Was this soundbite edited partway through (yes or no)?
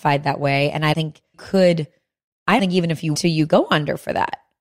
yes